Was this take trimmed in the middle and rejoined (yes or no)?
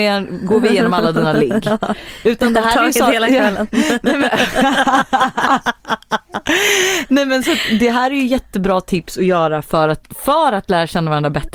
no